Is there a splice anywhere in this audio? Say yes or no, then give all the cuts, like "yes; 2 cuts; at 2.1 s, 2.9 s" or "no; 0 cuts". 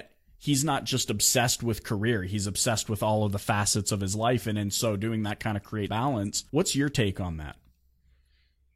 yes; 2 cuts; at 5.9 s, 6.5 s